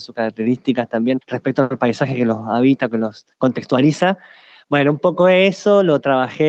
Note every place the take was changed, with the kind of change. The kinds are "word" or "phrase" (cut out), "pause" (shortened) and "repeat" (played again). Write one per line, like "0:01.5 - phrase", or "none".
0:01.2 - pause
0:03.3 - pause